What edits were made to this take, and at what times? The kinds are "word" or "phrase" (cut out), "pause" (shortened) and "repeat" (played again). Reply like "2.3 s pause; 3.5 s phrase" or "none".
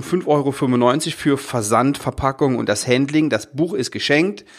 none